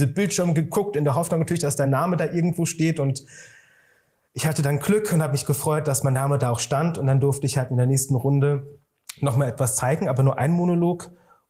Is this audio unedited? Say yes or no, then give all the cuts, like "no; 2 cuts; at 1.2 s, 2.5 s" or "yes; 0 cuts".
yes; 0 cuts